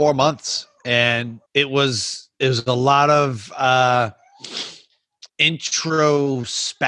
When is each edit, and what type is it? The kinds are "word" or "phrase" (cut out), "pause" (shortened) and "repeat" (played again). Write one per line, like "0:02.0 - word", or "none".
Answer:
0:01.5 - pause
0:02.3 - pause
0:05.3 - pause